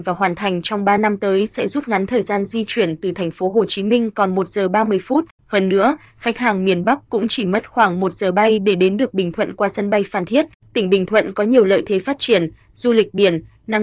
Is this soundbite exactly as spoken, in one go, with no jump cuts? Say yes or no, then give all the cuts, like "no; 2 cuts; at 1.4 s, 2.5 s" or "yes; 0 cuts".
yes; 0 cuts